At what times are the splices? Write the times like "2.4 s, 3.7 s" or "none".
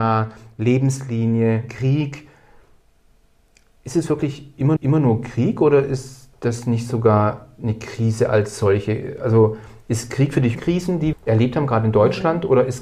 4.8 s, 10.5 s, 11.1 s